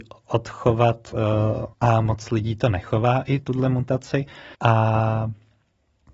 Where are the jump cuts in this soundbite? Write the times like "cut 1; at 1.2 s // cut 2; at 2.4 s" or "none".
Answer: cut 1; at 1.7 s // cut 2; at 4.5 s